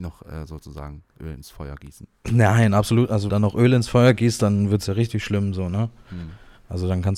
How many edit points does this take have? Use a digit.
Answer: 2